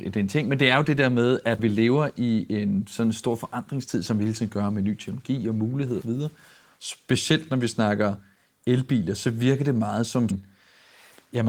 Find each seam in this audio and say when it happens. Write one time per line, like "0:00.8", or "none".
0:01.6
0:06.0
0:10.3